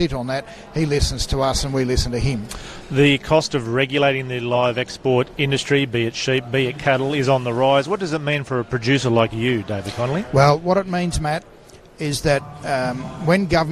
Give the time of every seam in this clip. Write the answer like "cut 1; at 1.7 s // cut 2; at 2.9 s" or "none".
none